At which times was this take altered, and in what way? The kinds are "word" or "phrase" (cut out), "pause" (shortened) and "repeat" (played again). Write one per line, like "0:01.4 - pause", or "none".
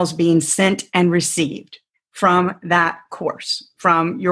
none